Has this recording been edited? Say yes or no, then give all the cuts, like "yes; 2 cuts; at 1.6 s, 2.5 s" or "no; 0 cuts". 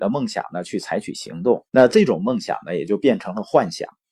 yes; 1 cut; at 1.7 s